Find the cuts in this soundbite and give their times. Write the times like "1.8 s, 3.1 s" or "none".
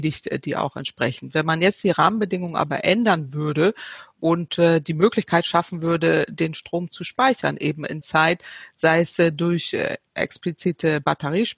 8.0 s